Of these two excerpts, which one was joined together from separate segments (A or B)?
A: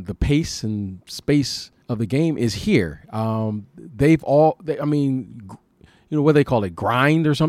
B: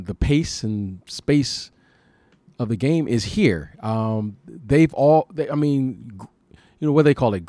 A